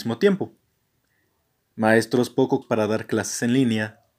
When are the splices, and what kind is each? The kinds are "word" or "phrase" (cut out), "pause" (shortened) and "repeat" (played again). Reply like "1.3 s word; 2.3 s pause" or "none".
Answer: 2.6 s word